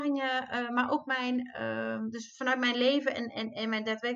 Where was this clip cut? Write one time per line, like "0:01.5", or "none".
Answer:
none